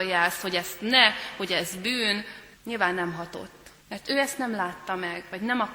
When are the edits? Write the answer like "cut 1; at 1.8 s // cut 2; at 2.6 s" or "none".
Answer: cut 1; at 2.5 s // cut 2; at 3.8 s